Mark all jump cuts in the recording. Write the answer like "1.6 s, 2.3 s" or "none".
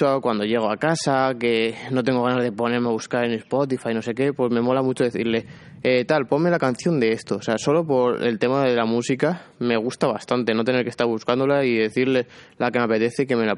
none